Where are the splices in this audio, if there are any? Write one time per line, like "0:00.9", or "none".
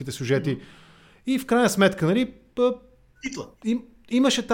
none